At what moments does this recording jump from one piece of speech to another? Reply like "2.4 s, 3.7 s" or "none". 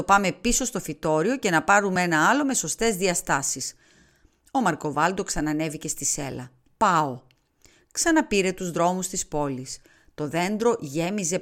none